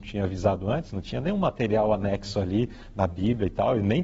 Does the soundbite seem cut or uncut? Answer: uncut